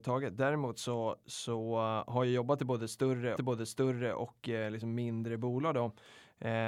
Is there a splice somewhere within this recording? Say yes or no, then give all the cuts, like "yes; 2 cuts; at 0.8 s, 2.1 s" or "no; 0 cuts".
yes; 1 cut; at 3.4 s